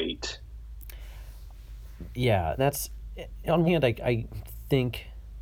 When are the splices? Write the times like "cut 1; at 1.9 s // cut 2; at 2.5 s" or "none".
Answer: cut 1; at 2.6 s // cut 2; at 3.7 s